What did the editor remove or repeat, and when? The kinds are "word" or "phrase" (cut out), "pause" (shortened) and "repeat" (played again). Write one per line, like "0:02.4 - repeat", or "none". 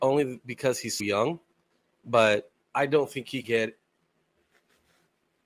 0:01.0 - word
0:03.4 - word